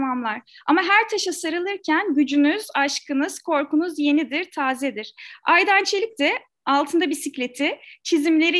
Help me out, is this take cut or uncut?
uncut